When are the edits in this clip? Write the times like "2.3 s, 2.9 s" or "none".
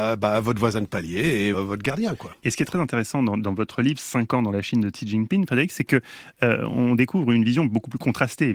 1.5 s